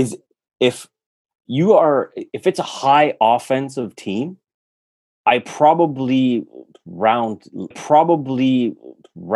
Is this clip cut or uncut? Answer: cut